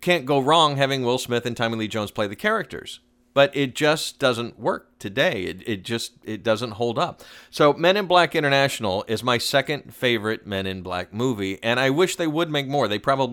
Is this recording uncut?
yes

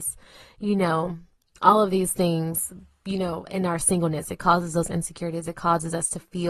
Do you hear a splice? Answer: no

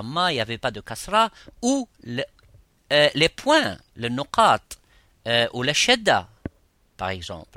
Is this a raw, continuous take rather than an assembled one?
yes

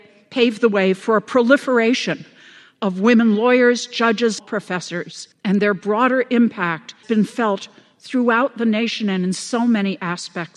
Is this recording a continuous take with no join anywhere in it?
no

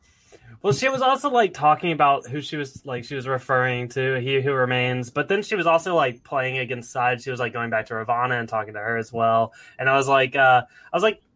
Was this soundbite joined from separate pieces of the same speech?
no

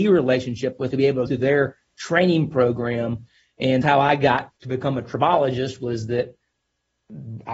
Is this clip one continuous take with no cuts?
no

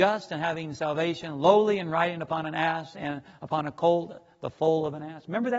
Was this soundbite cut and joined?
no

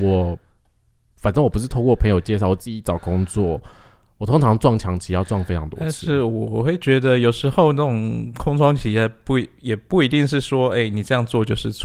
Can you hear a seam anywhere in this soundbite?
no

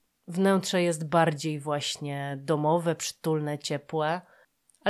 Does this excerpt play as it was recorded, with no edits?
yes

